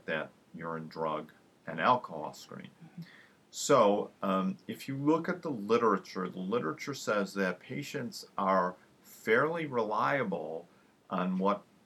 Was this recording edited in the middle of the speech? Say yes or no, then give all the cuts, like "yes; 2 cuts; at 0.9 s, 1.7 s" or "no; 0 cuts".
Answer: no; 0 cuts